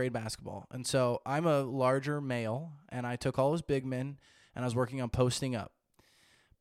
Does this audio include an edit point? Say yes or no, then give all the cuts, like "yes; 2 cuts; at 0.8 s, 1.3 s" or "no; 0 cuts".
no; 0 cuts